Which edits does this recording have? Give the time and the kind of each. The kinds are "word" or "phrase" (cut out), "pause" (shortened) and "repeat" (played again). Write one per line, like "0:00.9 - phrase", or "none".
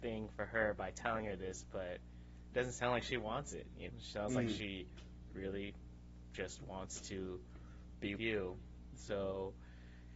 0:03.9 - word
0:08.2 - word